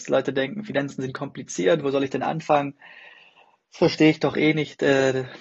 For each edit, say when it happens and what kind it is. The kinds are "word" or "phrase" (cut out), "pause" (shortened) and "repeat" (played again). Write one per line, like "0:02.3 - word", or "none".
none